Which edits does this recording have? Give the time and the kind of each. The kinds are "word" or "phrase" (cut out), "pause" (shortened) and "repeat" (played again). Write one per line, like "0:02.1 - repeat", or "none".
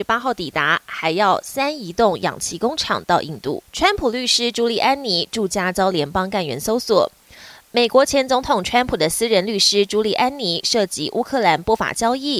0:03.7 - pause